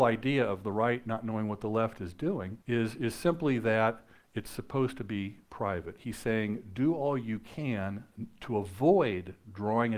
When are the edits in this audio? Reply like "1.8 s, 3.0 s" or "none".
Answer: 2.6 s